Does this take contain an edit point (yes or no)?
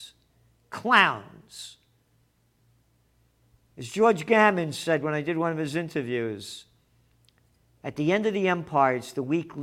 no